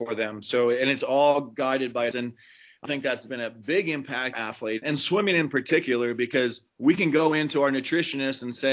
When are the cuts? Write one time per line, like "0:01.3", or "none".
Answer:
0:02.1
0:02.8
0:04.3
0:04.8
0:06.7